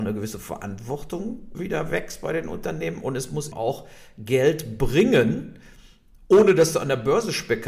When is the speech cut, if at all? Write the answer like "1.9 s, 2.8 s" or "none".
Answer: 1.5 s, 3.5 s